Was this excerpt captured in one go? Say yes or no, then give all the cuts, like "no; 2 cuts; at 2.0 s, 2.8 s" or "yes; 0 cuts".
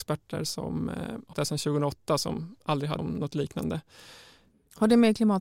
no; 2 cuts; at 1.3 s, 3.0 s